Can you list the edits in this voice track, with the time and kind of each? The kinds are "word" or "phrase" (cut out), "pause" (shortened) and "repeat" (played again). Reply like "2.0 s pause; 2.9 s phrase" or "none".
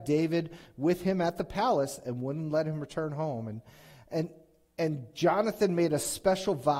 none